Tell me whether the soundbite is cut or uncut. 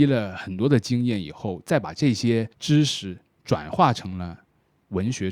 cut